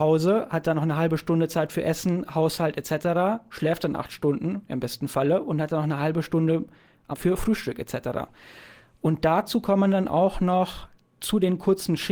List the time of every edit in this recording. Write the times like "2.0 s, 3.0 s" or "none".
7.1 s